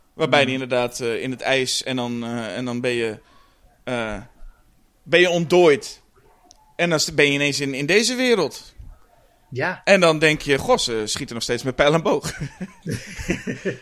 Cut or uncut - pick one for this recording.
uncut